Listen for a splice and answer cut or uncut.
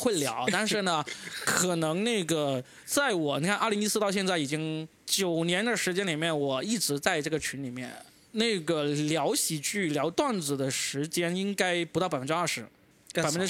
uncut